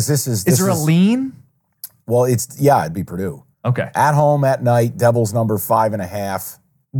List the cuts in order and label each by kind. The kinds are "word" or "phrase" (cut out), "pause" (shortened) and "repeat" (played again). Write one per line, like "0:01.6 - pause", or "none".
0:03.5 - pause